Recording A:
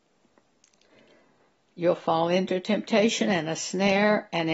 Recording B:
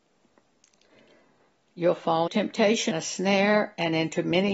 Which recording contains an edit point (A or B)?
B